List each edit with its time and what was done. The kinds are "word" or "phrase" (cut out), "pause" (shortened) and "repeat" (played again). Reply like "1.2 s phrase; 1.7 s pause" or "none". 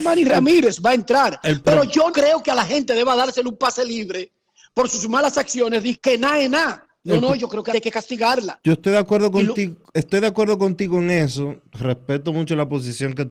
2.1 s word; 6.0 s word; 7.7 s word

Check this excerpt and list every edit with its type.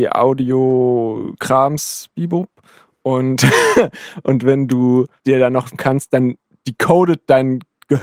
5.2 s word; 5.7 s phrase

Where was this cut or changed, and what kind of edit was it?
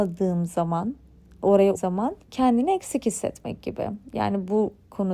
1.7 s word; 2.2 s pause

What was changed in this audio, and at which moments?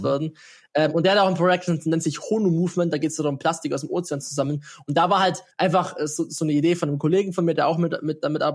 5.5 s pause

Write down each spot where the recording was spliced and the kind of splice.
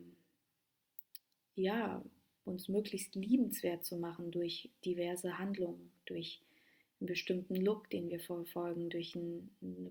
none

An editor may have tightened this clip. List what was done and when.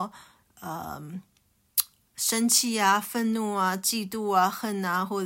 none

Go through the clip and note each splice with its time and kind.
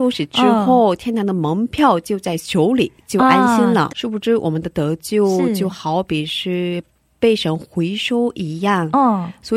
3.9 s word

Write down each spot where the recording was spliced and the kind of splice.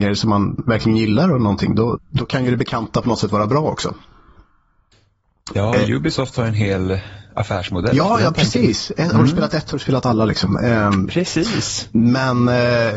2.0 s word

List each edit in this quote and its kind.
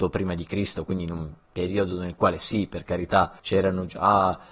3.4 s pause

